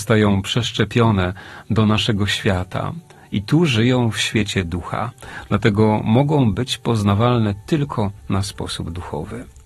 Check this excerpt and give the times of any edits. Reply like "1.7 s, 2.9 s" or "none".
none